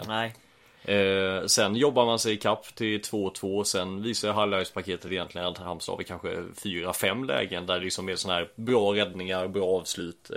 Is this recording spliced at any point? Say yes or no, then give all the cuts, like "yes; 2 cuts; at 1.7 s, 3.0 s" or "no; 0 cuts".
no; 0 cuts